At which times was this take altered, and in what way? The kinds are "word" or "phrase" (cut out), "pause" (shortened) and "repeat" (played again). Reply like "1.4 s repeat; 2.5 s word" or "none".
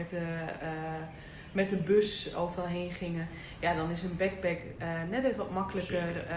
none